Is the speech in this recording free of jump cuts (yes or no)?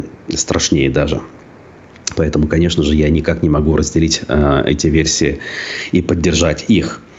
yes